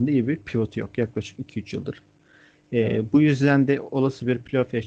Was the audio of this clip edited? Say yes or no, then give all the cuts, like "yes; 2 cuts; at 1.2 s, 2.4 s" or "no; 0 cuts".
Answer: no; 0 cuts